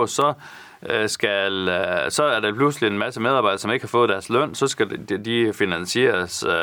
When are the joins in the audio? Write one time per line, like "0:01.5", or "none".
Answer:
none